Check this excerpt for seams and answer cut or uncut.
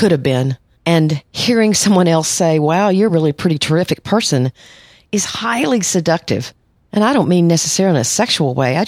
uncut